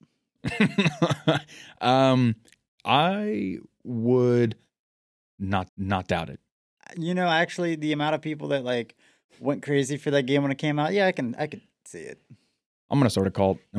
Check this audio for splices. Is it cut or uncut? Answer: cut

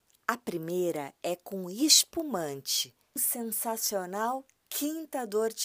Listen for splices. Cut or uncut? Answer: cut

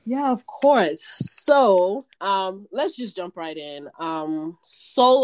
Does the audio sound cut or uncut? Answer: cut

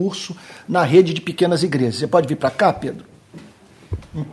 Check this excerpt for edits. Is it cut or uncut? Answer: uncut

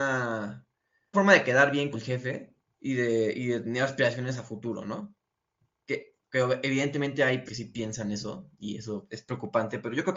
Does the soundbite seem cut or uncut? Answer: cut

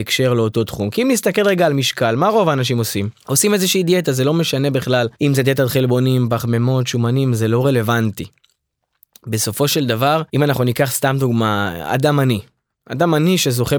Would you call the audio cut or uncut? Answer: cut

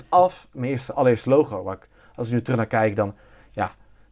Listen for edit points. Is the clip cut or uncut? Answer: uncut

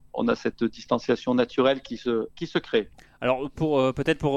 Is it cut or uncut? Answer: uncut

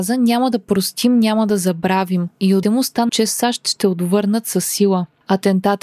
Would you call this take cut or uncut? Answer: cut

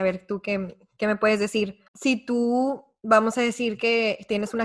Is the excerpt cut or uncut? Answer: cut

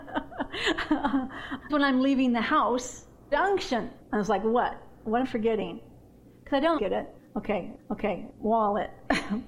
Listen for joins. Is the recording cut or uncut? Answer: cut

